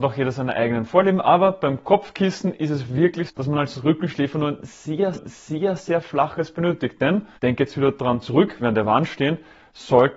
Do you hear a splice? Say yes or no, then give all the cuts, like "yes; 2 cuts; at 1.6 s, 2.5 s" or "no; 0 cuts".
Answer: yes; 4 cuts; at 3.3 s, 5.1 s, 7.3 s, 8.6 s